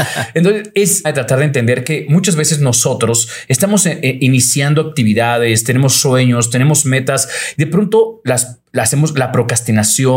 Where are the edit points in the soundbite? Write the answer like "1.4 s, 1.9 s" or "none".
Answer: 1.0 s